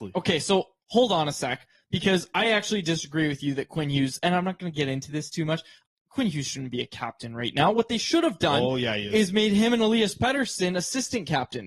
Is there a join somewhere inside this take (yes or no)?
no